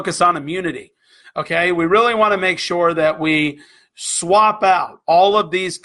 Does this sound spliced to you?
no; 0 cuts

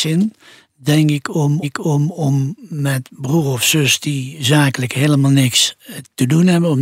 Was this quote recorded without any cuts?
no; 1 cut; at 1.6 s

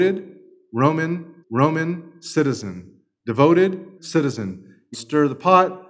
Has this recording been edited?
yes; 3 cuts; at 1.4 s, 4.0 s, 4.9 s

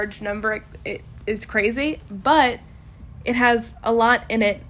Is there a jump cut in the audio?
no; 0 cuts

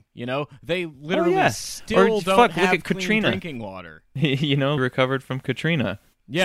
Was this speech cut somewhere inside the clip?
yes; 1 cut; at 4.8 s

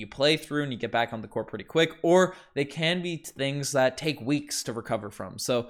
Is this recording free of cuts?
yes; 0 cuts

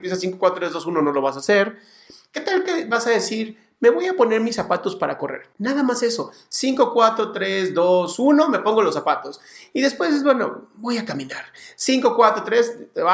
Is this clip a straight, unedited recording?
no; 1 cut; at 5.5 s

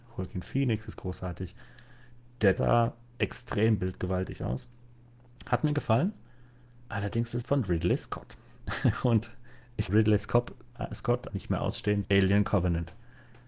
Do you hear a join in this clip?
yes; 5 cuts; at 2.6 s, 7.4 s, 9.9 s, 11.3 s, 12.0 s

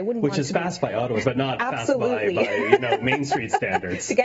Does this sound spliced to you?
yes; 1 cut; at 1.2 s

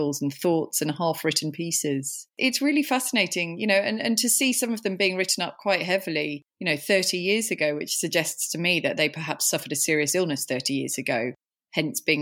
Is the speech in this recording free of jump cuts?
no; 2 cuts; at 2.3 s, 6.5 s

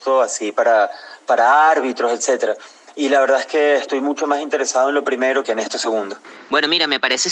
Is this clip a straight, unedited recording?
no; 1 cut; at 5.4 s

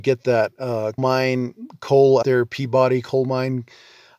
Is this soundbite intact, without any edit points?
no; 2 cuts; at 1.0 s, 2.2 s

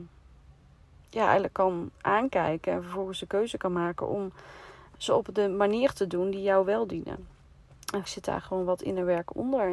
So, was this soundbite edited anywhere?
yes; 2 cuts; at 4.9 s, 8.0 s

